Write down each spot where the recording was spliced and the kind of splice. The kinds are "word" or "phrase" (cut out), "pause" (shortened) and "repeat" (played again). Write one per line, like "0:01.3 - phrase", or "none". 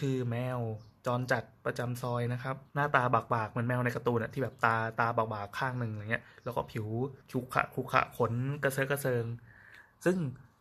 0:02.7 - pause
0:07.2 - pause